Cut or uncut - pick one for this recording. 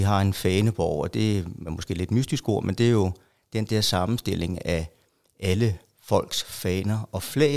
uncut